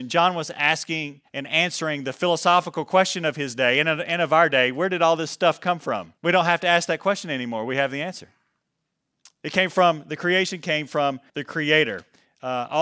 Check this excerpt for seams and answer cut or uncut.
cut